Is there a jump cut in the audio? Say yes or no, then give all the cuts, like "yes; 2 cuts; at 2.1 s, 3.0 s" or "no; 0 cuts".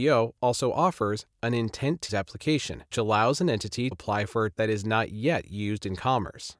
yes; 4 cuts; at 2.1 s, 2.9 s, 3.9 s, 4.5 s